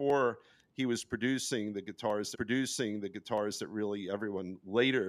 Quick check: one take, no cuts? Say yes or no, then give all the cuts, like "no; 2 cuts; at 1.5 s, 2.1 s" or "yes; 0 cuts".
no; 1 cut; at 2.3 s